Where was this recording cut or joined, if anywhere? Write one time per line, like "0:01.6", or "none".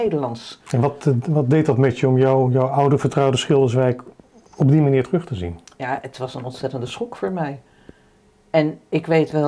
none